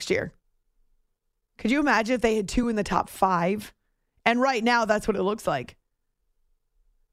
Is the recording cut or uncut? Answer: uncut